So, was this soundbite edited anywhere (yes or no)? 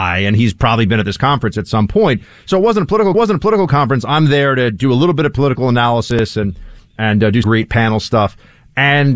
yes